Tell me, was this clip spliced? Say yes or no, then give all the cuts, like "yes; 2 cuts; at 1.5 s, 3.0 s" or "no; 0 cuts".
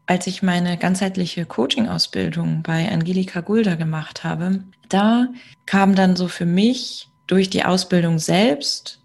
no; 0 cuts